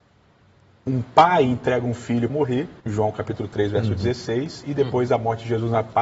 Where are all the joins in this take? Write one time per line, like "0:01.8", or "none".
0:02.3
0:02.8